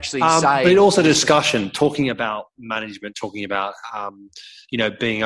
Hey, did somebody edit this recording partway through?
no; 0 cuts

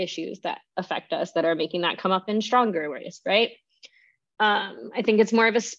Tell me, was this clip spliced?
no; 0 cuts

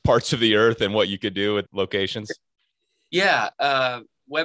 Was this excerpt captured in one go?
no; 1 cut; at 1.7 s

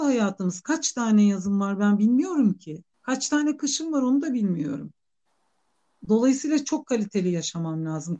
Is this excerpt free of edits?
no; 1 cut; at 2.9 s

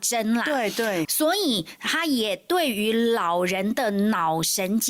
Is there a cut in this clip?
yes; 1 cut; at 1.0 s

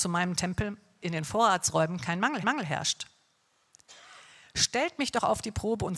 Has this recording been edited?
yes; 2 cuts; at 1.0 s, 2.4 s

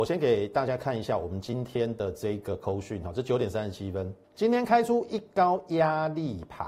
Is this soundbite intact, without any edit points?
no; 1 cut; at 4.2 s

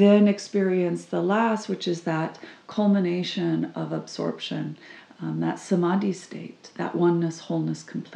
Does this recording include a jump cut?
no; 0 cuts

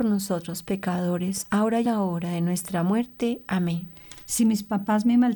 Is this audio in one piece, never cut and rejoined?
no; 1 cut; at 1.9 s

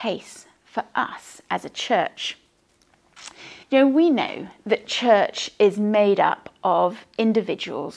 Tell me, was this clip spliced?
yes; 1 cut; at 3.6 s

